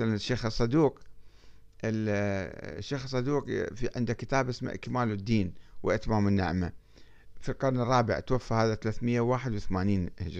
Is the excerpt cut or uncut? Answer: uncut